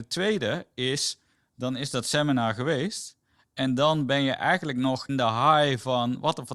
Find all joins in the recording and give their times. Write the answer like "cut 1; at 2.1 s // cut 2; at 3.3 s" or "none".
cut 1; at 5.1 s